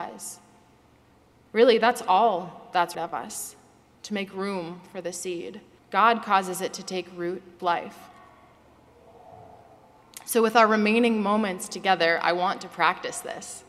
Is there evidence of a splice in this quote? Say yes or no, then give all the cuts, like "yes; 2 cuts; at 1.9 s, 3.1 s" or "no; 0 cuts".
yes; 3 cuts; at 2.9 s, 5.8 s, 7.6 s